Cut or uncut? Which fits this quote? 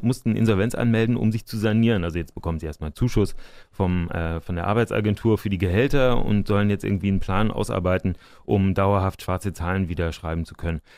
uncut